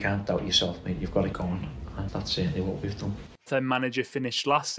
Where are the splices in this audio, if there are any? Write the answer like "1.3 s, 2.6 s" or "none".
1.3 s, 2.1 s, 3.5 s